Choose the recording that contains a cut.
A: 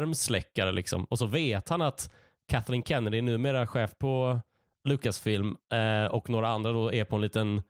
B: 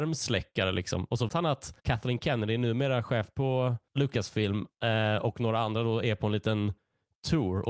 B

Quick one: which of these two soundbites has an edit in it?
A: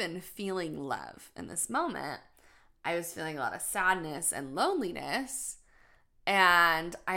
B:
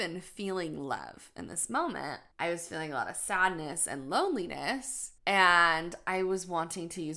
B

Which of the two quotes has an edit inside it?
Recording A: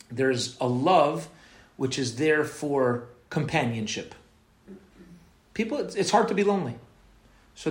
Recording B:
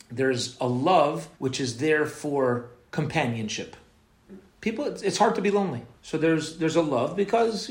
B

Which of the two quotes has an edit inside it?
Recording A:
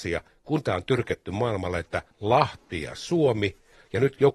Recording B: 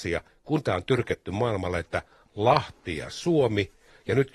A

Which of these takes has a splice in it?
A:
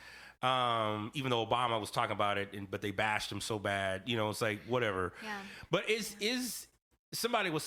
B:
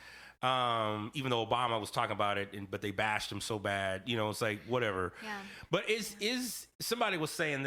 B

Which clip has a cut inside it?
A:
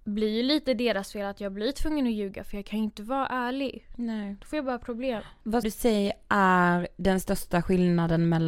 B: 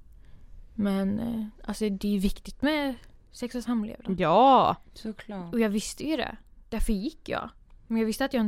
A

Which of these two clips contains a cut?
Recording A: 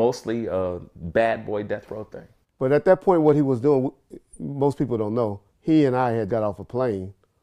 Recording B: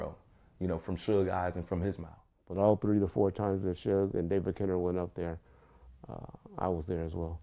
A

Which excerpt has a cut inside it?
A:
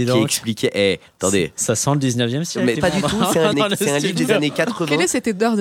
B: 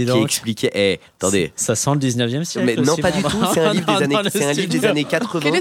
A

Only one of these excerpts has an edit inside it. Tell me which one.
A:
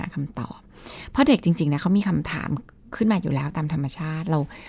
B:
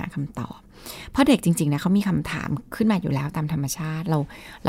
B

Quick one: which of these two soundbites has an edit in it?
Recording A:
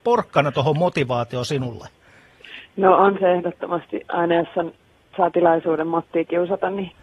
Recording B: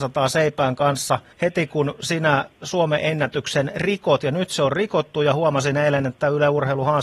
B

